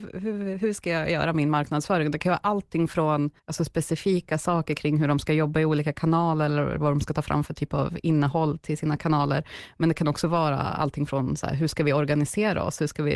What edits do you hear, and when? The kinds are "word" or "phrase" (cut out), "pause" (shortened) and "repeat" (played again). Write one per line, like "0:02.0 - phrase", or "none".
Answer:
0:03.4 - pause